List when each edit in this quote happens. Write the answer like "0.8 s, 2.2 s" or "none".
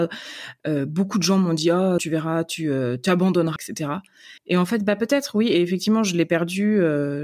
2.0 s, 3.6 s, 4.4 s